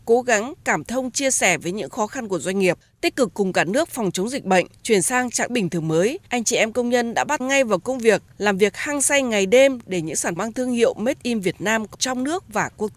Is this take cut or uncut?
cut